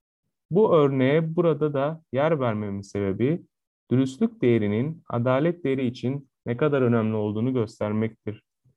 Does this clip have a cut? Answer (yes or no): no